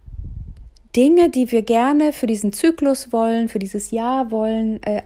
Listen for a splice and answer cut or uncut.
uncut